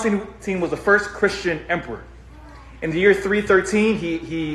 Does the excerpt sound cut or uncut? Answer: uncut